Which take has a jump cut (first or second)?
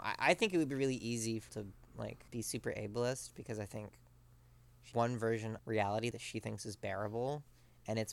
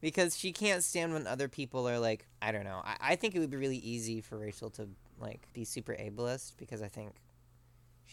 first